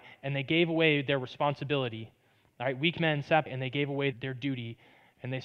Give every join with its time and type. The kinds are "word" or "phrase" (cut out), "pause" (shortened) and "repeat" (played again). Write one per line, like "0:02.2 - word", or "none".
0:03.5 - word
0:04.1 - word